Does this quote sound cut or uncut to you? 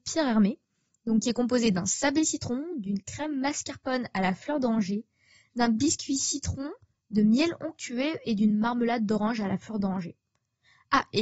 uncut